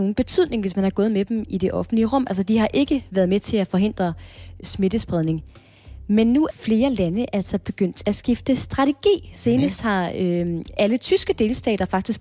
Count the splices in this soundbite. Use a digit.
3